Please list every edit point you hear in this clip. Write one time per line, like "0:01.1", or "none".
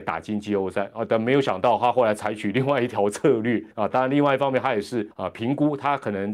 0:03.7
0:05.1